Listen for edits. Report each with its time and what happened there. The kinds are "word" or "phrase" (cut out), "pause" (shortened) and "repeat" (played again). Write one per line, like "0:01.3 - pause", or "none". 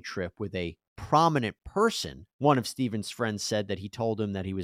0:02.3 - pause